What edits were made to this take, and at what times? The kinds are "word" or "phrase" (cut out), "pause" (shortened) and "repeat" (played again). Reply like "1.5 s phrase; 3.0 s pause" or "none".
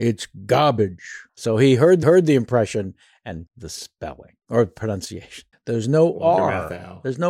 1.3 s pause; 2.0 s repeat; 3.5 s word; 4.4 s pause; 5.5 s pause